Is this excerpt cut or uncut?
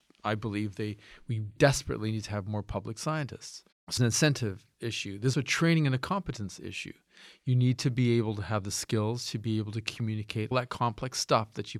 cut